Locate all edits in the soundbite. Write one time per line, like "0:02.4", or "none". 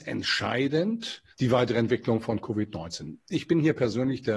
0:01.3